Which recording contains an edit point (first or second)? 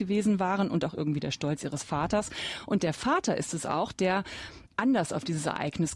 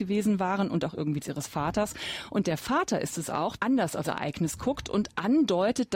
second